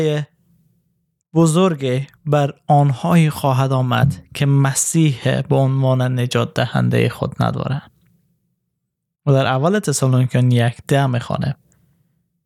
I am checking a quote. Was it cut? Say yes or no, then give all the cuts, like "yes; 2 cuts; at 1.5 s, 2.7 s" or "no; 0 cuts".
no; 0 cuts